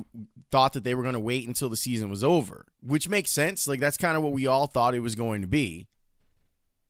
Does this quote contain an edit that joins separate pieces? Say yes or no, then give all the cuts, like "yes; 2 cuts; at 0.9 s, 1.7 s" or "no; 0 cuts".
yes; 1 cut; at 2.7 s